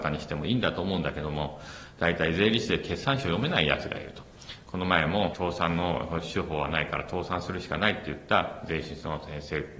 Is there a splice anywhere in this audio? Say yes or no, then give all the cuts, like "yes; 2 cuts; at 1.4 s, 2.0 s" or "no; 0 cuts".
yes; 1 cut; at 5.3 s